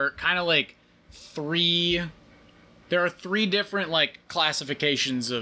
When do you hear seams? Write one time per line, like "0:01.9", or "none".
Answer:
none

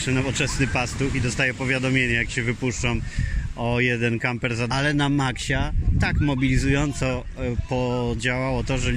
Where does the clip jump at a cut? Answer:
0:04.7

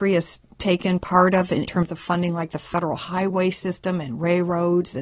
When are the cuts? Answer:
0:01.7

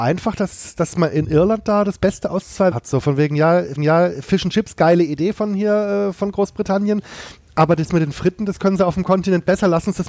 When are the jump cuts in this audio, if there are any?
0:02.7
0:03.8

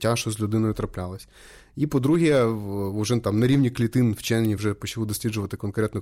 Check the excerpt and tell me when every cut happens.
none

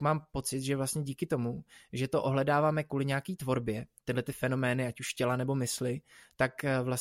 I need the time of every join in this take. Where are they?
none

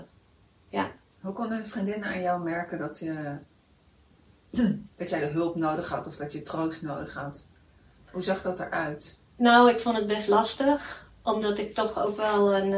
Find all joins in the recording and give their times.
none

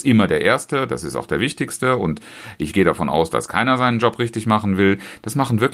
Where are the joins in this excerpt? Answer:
none

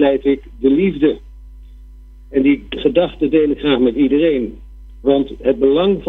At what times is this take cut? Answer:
none

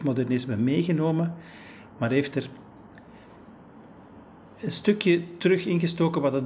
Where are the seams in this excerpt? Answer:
none

